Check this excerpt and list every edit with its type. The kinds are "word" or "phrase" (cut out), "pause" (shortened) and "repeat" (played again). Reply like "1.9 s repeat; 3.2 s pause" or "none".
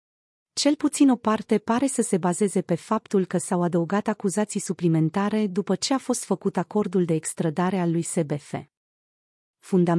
none